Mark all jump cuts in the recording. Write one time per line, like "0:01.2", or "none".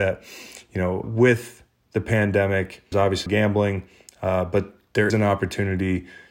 0:01.0
0:02.9
0:03.3
0:05.1